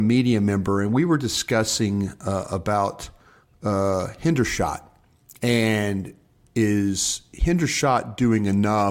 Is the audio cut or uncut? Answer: uncut